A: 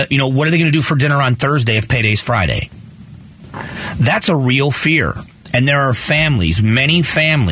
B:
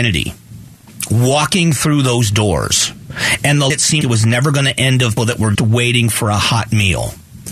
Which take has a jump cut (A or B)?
B